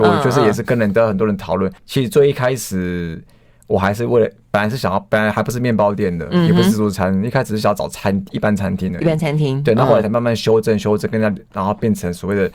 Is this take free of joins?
no; 1 cut; at 1.8 s

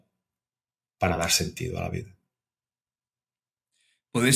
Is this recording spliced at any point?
no; 0 cuts

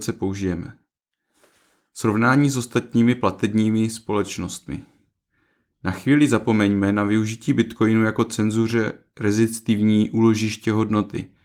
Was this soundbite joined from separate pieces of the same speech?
no; 0 cuts

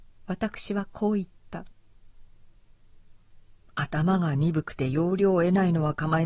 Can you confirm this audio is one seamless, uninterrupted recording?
no; 1 cut; at 2.6 s

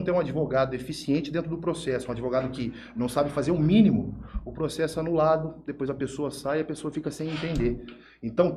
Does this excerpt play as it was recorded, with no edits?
yes; 0 cuts

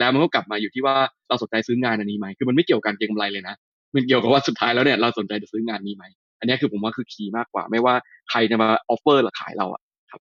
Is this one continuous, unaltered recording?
yes; 0 cuts

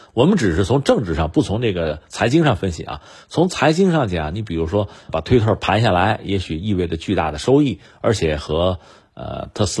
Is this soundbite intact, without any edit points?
no; 1 cut; at 5.1 s

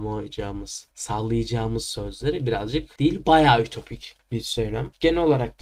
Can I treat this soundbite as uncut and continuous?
no; 1 cut; at 0.9 s

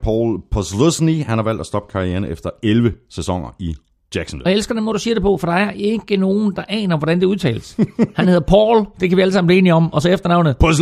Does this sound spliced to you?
no; 0 cuts

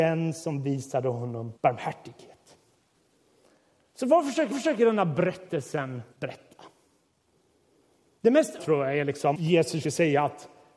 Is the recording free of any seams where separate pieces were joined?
no; 6 cuts; at 1.6 s, 4.5 s, 6.1 s, 8.6 s, 9.3 s, 9.8 s

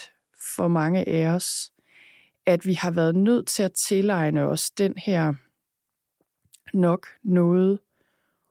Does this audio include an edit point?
no; 0 cuts

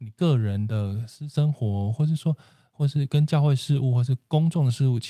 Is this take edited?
no; 0 cuts

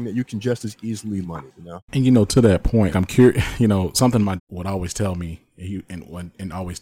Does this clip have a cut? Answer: yes; 5 cuts; at 1.2 s, 1.8 s, 2.9 s, 3.9 s, 4.4 s

